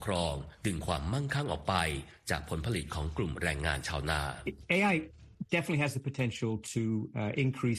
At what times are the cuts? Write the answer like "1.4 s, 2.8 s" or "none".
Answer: none